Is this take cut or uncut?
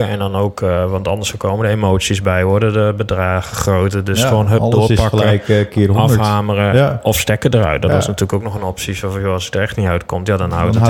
uncut